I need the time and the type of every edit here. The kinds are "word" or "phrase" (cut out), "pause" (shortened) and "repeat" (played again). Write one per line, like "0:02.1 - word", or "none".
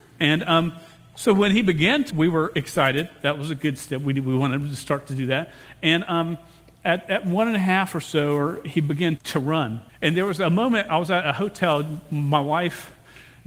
0:02.1 - word
0:09.2 - word
0:09.9 - pause

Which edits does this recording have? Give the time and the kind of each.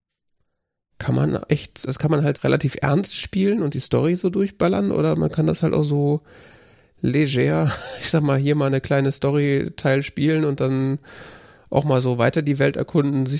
0:01.9 - word
0:02.3 - word

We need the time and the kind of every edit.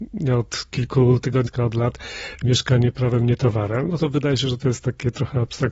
0:01.5 - word

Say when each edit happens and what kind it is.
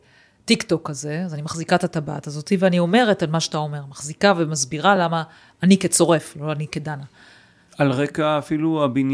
none

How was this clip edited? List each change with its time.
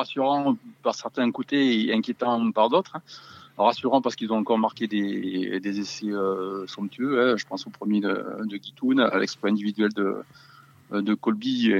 none

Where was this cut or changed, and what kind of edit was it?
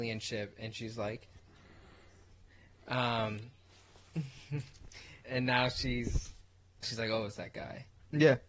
0:05.2 - word
0:06.8 - word

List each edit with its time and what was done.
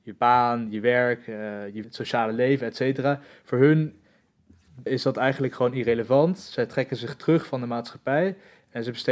0:01.8 - word
0:04.9 - word

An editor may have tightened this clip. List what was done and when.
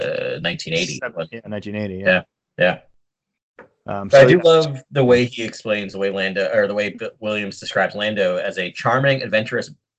none

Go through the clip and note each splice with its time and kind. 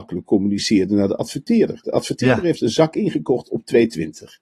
none

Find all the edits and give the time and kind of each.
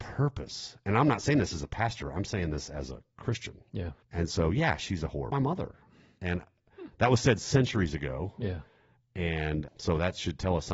0:04.0 - pause
0:05.3 - phrase
0:09.7 - word

